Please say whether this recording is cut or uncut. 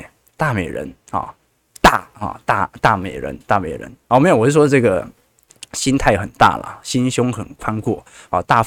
uncut